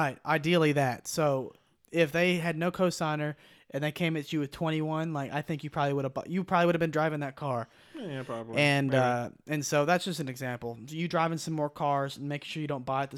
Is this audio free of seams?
yes; 0 cuts

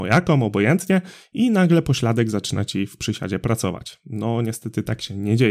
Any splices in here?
no; 0 cuts

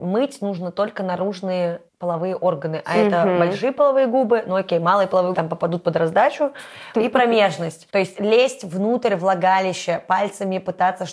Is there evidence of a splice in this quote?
yes; 4 cuts; at 1.9 s, 5.3 s, 6.9 s, 7.9 s

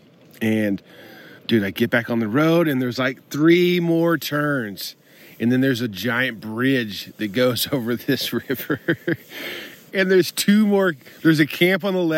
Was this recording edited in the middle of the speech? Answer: yes; 1 cut; at 1.4 s

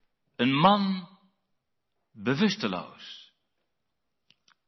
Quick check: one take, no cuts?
yes; 0 cuts

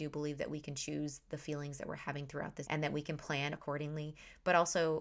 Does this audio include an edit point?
yes; 2 cuts; at 2.6 s, 3.5 s

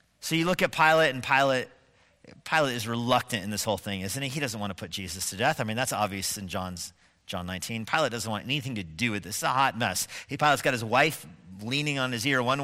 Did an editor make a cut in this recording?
no; 0 cuts

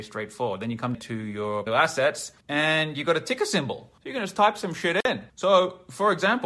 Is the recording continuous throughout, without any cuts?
no; 5 cuts; at 0.9 s, 1.7 s, 2.4 s, 4.0 s, 5.3 s

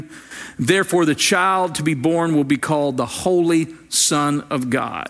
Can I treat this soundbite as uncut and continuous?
yes; 0 cuts

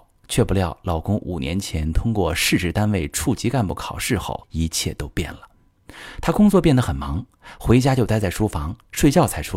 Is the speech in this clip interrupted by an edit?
yes; 1 cut; at 4.4 s

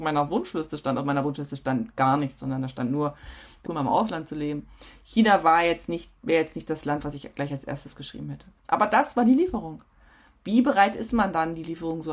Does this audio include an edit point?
yes; 1 cut; at 3.7 s

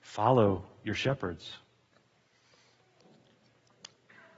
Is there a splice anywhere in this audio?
no; 0 cuts

